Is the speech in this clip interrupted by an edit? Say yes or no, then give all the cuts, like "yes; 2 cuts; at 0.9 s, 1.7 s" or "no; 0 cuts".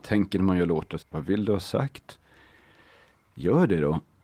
yes; 1 cut; at 1.0 s